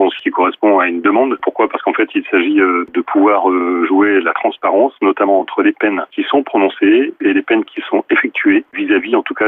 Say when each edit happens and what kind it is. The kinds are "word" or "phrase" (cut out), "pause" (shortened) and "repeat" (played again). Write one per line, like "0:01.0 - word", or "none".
none